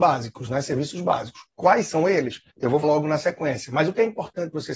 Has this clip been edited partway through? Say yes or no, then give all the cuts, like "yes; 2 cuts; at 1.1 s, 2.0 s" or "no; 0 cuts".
yes; 2 cuts; at 2.5 s, 2.8 s